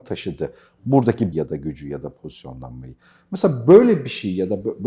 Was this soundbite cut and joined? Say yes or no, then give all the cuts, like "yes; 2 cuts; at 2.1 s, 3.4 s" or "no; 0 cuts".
yes; 1 cut; at 1.3 s